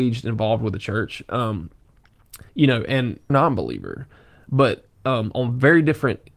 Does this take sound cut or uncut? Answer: cut